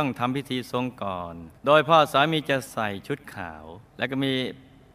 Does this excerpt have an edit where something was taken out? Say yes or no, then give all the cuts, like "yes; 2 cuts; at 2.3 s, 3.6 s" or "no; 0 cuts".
yes; 2 cuts; at 1.6 s, 3.9 s